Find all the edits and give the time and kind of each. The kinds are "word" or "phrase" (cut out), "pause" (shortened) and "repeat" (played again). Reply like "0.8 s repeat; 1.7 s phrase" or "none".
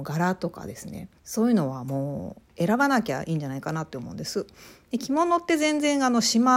1.2 s pause